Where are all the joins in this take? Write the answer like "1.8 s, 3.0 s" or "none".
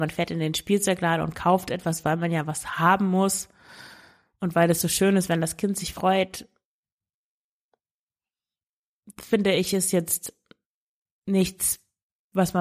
none

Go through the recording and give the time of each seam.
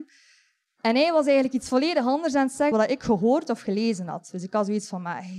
2.7 s

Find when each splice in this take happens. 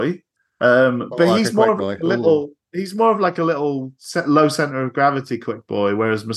none

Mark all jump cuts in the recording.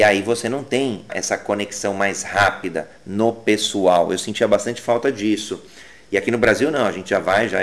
1.1 s

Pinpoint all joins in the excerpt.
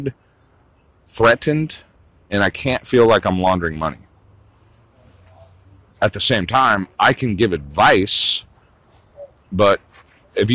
none

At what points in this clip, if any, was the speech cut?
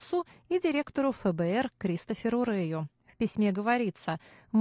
none

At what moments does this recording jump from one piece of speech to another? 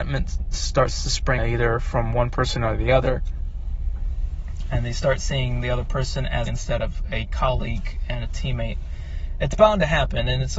1.4 s, 6.5 s

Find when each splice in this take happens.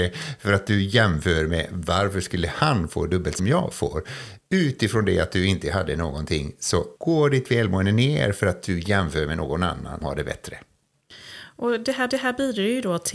3.4 s, 7.0 s, 10.0 s, 12.1 s

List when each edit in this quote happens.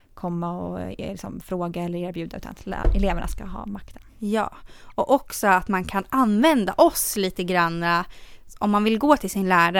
none

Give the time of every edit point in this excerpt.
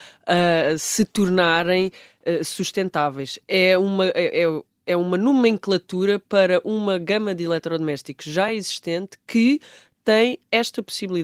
none

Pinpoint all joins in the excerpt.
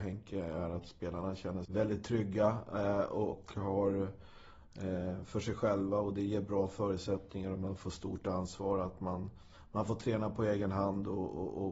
1.6 s, 3.3 s

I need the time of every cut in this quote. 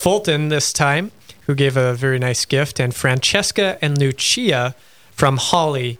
none

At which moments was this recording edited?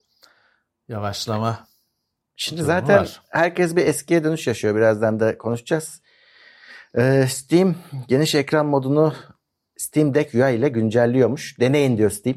none

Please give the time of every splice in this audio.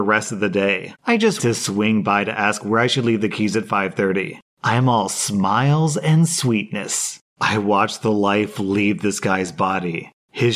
0.9 s, 1.4 s

